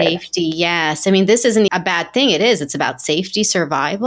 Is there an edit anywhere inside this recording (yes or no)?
yes